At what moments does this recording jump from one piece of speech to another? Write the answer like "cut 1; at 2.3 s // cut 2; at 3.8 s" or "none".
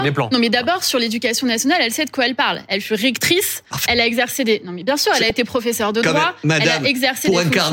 cut 1; at 3.9 s